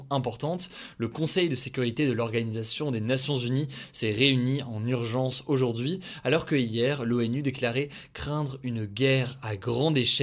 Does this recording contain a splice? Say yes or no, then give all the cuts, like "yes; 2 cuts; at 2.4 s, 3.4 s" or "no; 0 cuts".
no; 0 cuts